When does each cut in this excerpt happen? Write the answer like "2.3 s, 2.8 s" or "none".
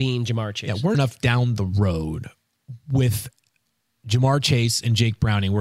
0.9 s